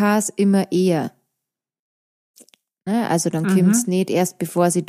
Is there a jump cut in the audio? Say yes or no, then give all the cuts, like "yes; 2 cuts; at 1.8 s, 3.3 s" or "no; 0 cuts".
no; 0 cuts